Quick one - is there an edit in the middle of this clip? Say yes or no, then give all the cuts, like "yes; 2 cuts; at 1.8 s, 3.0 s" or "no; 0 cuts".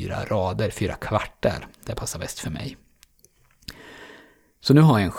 no; 0 cuts